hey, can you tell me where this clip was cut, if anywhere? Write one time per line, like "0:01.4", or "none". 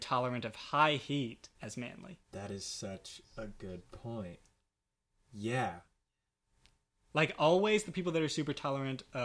0:01.5
0:02.2
0:05.0